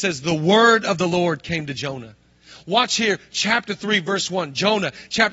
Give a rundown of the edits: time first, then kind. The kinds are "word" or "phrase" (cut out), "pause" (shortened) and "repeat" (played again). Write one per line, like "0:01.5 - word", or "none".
none

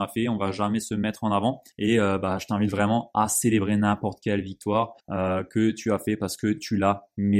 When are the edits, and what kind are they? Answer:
0:01.7 - pause
0:05.0 - pause

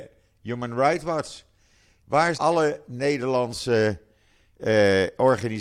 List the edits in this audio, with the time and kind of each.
0:02.3 - word

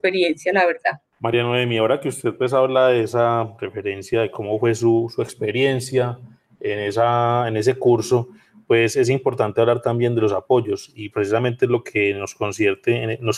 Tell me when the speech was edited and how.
0:11.1 - word

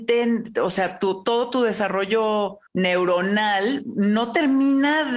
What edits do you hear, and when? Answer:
0:02.7 - pause

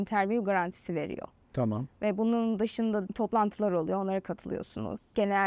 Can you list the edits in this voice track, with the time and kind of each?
0:03.1 - word

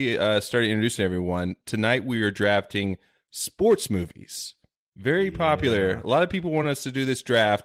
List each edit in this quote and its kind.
none

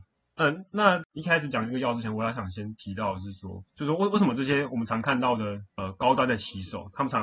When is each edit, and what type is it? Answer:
0:03.7 - pause
0:05.7 - pause

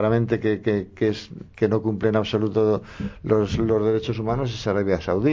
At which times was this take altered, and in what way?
0:01.5 - pause

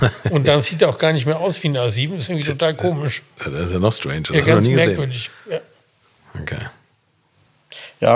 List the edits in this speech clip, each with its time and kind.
none

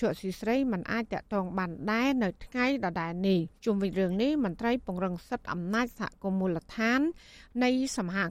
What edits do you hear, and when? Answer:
0:03.6 - pause

